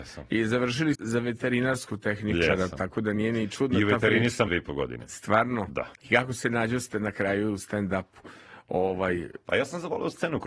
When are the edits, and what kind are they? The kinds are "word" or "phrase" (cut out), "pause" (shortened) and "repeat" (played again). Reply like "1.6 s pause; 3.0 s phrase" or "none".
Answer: 0.9 s word; 4.5 s word; 5.9 s pause